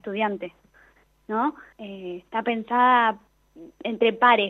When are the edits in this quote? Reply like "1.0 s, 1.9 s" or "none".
1.7 s

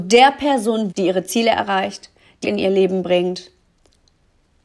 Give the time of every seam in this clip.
0.9 s, 2.4 s

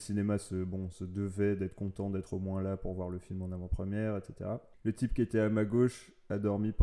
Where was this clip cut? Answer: none

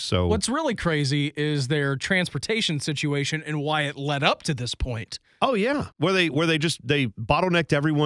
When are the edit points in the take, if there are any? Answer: 5.9 s

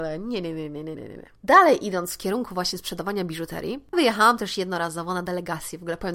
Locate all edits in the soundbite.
0.9 s, 1.4 s, 3.9 s

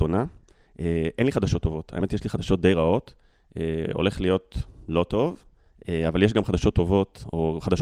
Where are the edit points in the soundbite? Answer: none

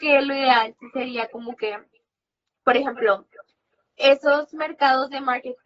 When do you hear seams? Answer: none

